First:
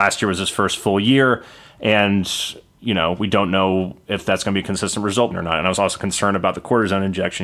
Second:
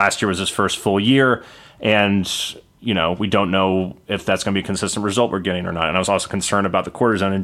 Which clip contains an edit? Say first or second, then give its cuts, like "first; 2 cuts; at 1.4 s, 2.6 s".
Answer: first; 1 cut; at 5.3 s